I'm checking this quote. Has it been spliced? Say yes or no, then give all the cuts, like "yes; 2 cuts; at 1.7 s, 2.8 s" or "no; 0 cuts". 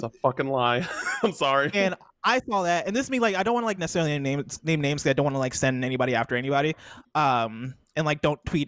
no; 0 cuts